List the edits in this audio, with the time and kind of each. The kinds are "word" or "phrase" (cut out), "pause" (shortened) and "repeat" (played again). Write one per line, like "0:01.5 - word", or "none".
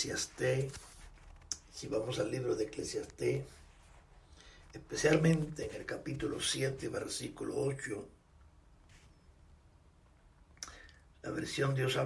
0:04.6 - pause